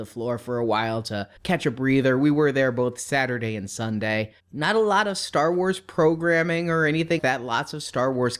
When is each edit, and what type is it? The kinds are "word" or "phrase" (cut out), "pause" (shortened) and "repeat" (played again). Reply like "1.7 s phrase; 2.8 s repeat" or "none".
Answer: 1.4 s pause; 4.4 s word; 7.2 s word